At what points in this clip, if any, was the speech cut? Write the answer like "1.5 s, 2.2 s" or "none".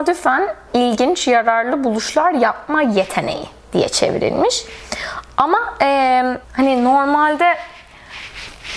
6.4 s